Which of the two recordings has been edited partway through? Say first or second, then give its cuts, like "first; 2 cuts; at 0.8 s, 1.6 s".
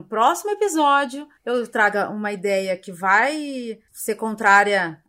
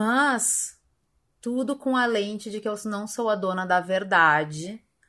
first; 2 cuts; at 1.4 s, 3.9 s